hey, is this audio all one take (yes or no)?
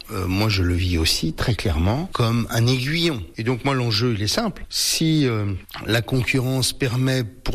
yes